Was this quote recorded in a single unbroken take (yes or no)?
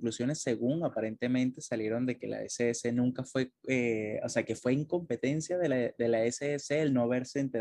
yes